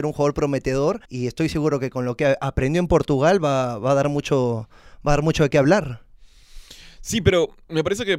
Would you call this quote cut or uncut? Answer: cut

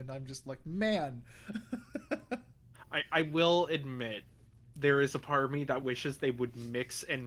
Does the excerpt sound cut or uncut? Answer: uncut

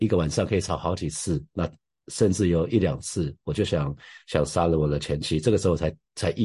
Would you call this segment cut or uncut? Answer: uncut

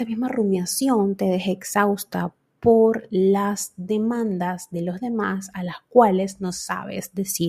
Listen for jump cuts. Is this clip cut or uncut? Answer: uncut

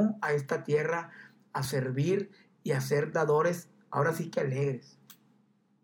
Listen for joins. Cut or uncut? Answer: uncut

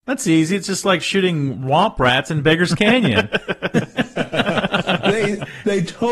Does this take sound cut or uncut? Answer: uncut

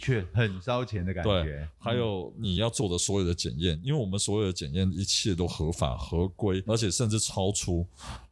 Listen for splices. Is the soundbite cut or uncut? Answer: cut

